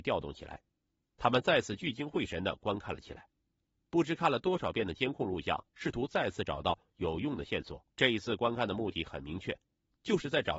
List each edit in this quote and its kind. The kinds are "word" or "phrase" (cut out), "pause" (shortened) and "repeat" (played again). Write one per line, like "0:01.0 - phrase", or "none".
0:05.7 - pause
0:07.9 - pause